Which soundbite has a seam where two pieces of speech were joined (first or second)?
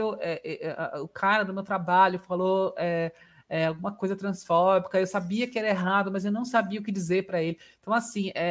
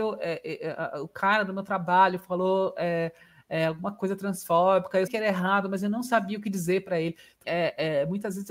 second